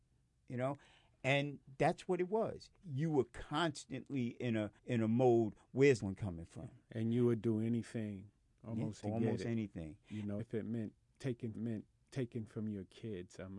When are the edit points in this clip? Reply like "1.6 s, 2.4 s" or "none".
4.8 s, 6.0 s, 9.0 s, 10.4 s, 11.5 s